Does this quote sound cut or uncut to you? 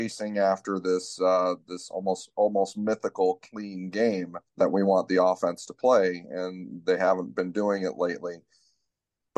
cut